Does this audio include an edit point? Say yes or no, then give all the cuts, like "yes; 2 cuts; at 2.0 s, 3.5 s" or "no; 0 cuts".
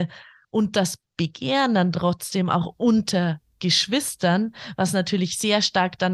no; 0 cuts